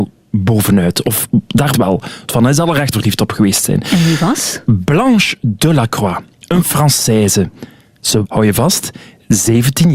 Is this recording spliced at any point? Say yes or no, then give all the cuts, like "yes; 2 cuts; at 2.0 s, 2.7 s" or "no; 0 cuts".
yes; 4 cuts; at 1.7 s, 2.3 s, 2.9 s, 8.2 s